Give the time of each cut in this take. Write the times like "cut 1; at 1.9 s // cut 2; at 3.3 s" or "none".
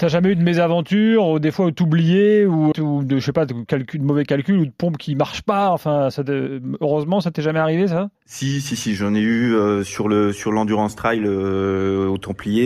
cut 1; at 2.7 s // cut 2; at 8.1 s